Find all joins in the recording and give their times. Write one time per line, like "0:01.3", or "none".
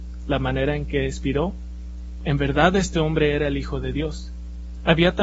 0:02.2